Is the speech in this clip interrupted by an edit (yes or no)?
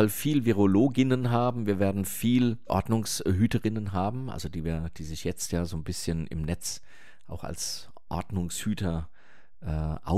no